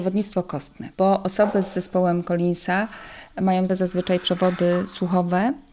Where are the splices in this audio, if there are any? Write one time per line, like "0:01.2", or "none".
0:00.9
0:03.7